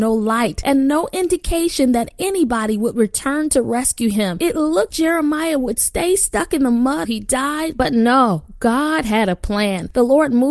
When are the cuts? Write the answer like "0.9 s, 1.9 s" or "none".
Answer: 4.9 s, 7.0 s